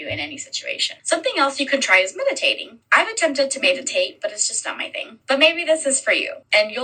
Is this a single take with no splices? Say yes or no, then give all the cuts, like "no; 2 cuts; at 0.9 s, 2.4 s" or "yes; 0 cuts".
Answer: yes; 0 cuts